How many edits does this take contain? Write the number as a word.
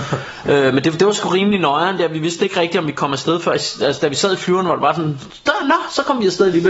zero